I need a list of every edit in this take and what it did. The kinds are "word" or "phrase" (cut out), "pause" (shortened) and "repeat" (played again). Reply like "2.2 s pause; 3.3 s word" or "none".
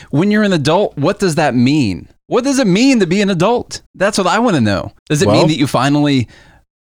3.9 s pause; 5.0 s pause

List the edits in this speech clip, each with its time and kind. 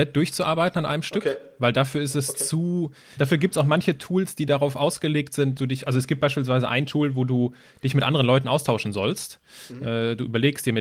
3.2 s word; 5.6 s word

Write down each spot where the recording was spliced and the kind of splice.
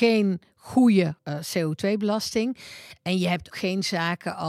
1.2 s word; 3.5 s word

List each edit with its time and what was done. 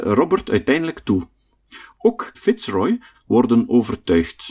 1.0 s word; 2.3 s word; 3.1 s phrase

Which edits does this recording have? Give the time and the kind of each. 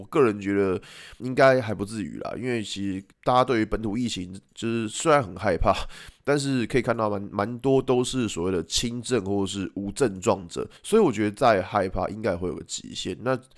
1.2 s word; 3.1 s pause; 4.5 s pause; 10.8 s pause

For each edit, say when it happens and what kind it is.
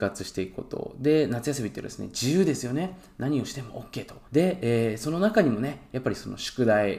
4.3 s pause

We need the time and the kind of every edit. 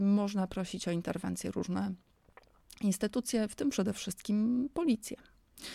none

